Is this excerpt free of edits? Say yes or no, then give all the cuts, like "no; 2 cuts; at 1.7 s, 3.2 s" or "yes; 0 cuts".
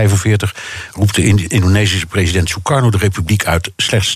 yes; 0 cuts